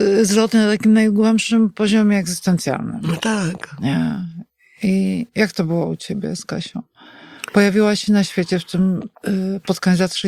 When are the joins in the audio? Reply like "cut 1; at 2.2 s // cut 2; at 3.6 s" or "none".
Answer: cut 1; at 9.1 s